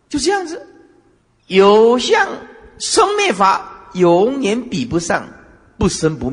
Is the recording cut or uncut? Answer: cut